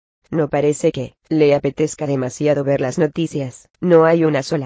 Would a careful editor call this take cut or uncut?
cut